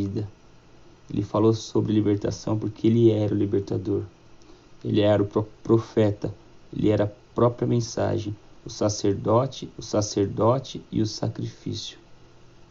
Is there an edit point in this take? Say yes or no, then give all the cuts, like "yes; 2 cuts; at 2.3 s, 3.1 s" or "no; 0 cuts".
yes; 1 cut; at 9.8 s